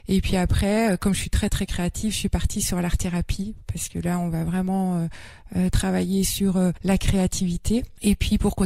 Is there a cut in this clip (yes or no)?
no